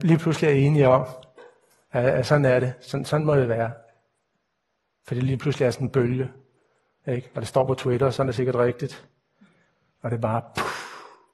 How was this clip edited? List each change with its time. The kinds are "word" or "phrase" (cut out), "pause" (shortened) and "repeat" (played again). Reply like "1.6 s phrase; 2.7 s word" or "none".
none

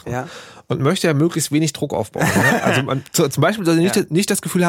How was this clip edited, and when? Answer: none

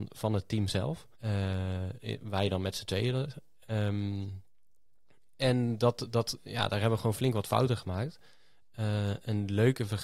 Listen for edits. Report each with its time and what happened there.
1.1 s pause

